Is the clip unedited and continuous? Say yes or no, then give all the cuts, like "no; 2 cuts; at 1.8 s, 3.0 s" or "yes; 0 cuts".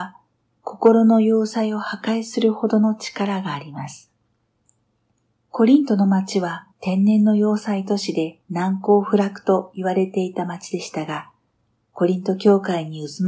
no; 3 cuts; at 5.1 s, 6.7 s, 8.4 s